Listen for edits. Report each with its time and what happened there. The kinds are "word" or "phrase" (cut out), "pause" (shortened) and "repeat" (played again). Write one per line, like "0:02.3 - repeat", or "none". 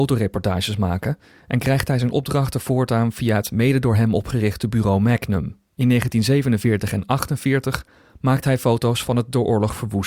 0:05.6 - pause